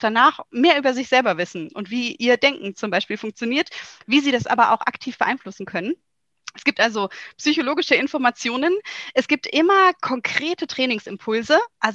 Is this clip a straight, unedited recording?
yes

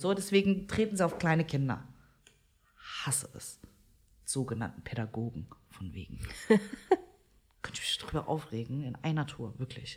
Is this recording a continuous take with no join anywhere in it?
yes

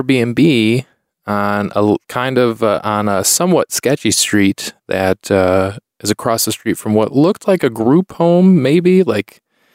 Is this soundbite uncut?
no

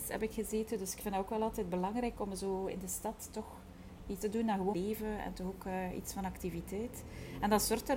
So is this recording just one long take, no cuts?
no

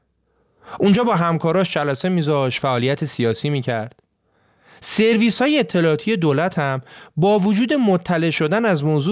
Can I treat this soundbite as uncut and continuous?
yes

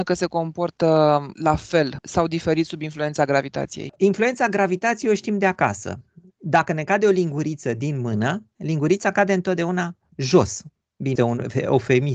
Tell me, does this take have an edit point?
yes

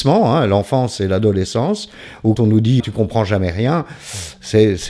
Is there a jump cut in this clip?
yes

